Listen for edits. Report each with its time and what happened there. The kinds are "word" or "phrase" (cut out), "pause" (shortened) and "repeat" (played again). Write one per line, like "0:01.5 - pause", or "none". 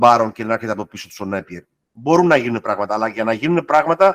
none